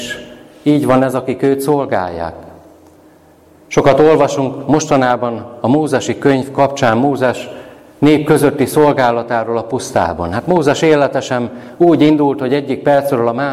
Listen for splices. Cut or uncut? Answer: uncut